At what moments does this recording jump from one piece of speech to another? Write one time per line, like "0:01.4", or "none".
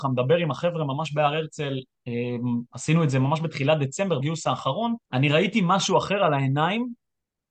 0:04.2
0:05.0